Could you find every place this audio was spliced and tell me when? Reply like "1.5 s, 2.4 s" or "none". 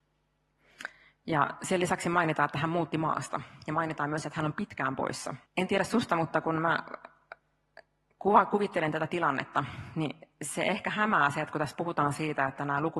5.5 s